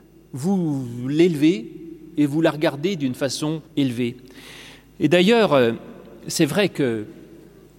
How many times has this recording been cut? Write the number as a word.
one